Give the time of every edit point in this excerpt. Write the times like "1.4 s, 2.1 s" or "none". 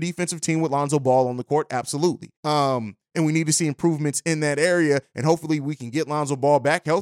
2.4 s